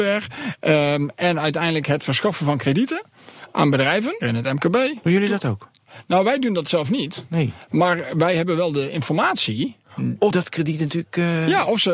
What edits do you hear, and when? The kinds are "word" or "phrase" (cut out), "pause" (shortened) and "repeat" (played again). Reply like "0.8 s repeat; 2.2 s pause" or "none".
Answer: 4.2 s word; 10.3 s word

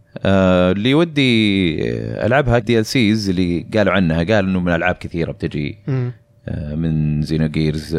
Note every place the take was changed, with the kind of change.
2.6 s word

